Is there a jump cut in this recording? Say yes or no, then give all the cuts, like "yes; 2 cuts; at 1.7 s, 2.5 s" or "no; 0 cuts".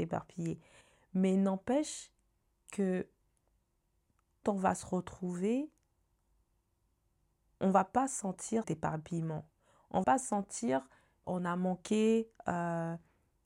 yes; 4 cuts; at 4.4 s, 8.6 s, 10.0 s, 11.2 s